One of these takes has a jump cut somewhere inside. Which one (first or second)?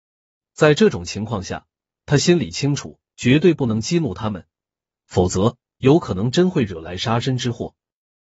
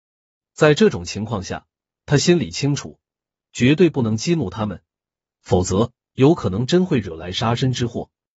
first